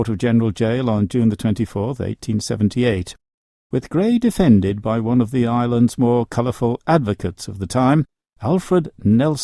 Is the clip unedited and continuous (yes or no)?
yes